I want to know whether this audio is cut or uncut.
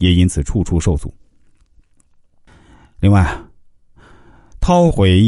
uncut